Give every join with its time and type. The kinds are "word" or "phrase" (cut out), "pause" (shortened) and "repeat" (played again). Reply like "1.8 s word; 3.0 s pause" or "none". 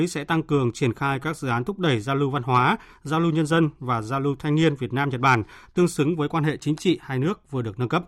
none